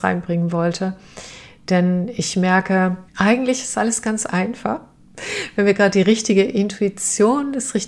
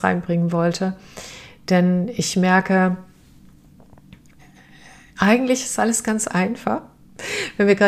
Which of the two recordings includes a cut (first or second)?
first